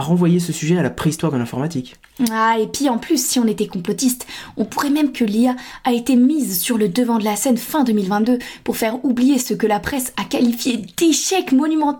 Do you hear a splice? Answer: yes; 1 cut; at 5.1 s

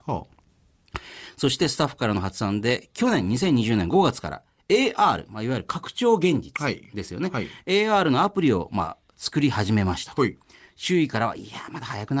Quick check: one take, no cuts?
yes; 0 cuts

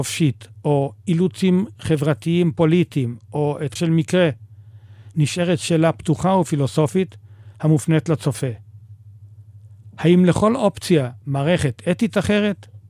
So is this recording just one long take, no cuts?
no; 1 cut; at 3.8 s

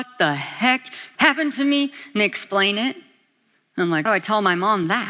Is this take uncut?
no; 2 cuts; at 1.2 s, 4.1 s

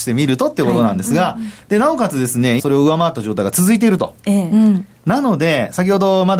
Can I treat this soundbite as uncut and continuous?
no; 1 cut; at 2.6 s

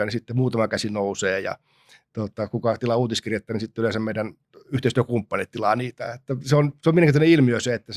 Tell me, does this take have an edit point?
no; 0 cuts

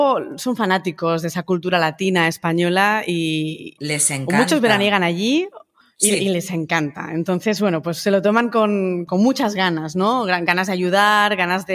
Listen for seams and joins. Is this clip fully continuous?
yes; 0 cuts

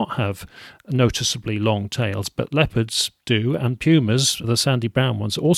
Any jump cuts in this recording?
yes; 1 cut; at 4.4 s

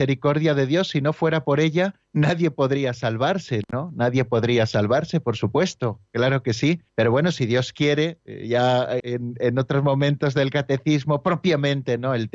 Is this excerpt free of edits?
no; 3 cuts; at 2.0 s, 6.9 s, 9.0 s

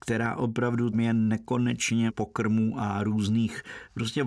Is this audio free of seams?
no; 2 cuts; at 0.9 s, 2.1 s

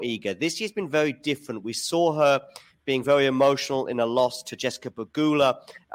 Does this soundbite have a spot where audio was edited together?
no; 0 cuts

